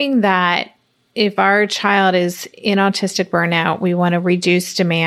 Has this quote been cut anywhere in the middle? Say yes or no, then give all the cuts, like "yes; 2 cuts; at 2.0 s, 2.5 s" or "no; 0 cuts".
no; 0 cuts